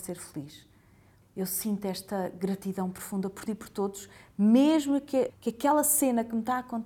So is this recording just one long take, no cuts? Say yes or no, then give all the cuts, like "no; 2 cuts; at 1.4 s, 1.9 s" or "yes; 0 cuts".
no; 3 cuts; at 1.2 s, 3.5 s, 5.3 s